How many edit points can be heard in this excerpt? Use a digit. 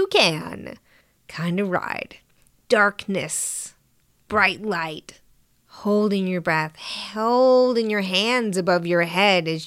0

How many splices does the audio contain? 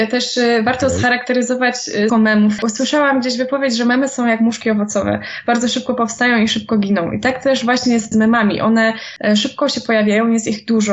2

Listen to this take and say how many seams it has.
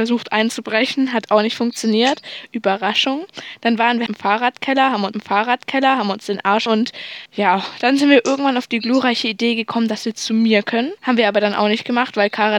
5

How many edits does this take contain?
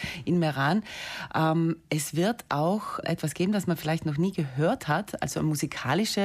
1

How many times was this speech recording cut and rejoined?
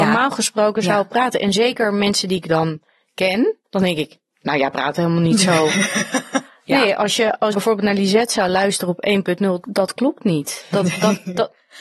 3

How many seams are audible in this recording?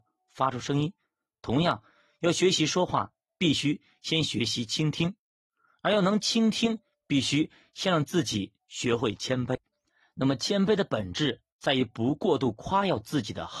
0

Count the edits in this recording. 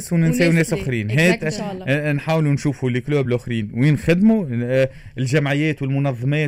0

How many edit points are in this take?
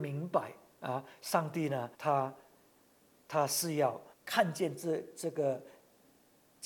2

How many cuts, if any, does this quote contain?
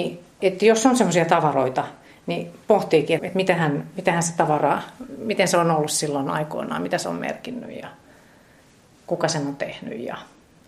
1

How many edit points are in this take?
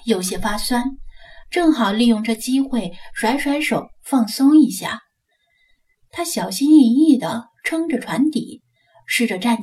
0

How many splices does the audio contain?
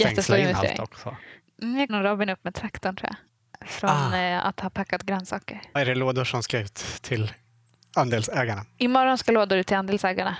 2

